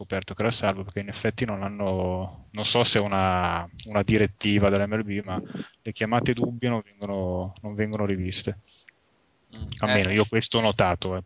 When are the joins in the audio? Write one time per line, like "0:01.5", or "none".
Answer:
none

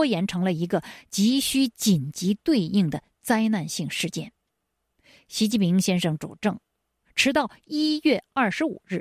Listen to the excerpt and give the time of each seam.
none

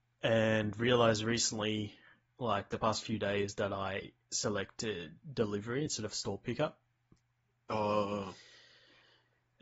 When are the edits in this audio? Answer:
none

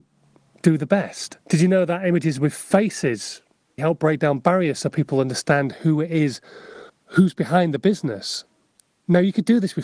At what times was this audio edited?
0:01.4
0:03.8
0:06.9

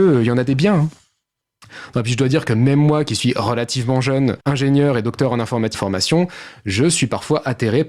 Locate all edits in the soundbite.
0:04.4
0:05.7

